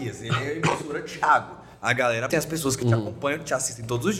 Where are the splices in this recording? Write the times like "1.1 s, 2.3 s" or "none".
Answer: 2.3 s